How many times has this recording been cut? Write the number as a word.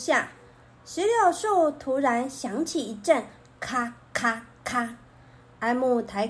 zero